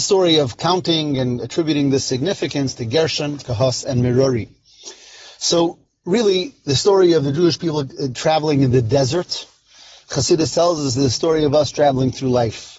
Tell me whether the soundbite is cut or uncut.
uncut